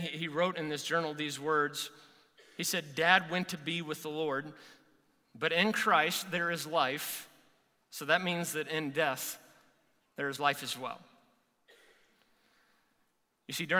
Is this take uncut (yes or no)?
yes